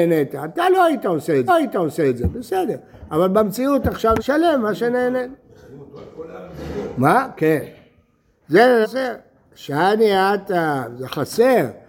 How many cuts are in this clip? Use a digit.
3